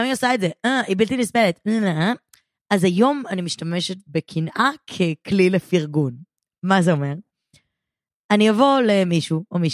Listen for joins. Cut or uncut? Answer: uncut